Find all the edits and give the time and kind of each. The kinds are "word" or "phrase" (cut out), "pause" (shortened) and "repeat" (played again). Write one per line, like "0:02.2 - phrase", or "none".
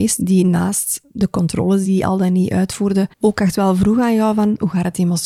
0:01.9 - word
0:03.1 - pause